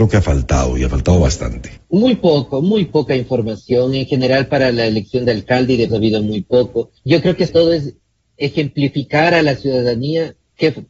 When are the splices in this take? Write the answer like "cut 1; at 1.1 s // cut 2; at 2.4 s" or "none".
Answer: cut 1; at 1.8 s // cut 2; at 5.9 s // cut 3; at 7.0 s // cut 4; at 7.5 s // cut 5; at 8.2 s